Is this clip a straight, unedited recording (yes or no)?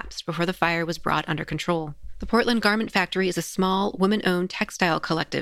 yes